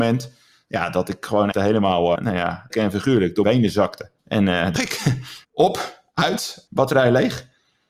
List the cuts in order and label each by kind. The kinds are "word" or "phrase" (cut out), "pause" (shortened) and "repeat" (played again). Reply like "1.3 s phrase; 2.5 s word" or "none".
1.5 s word; 2.2 s word; 2.7 s word; 3.4 s word; 4.2 s pause; 4.8 s word; 5.4 s pause; 6.7 s word